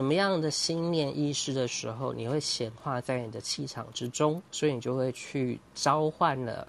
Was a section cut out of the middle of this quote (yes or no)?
yes